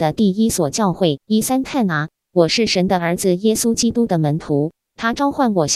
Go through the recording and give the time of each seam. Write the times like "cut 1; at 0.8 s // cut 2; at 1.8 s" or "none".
cut 1; at 1.2 s